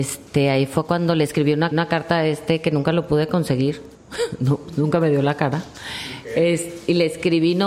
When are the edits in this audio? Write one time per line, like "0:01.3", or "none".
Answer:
0:01.7
0:03.9